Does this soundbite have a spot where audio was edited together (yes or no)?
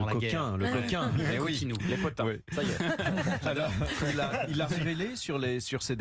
no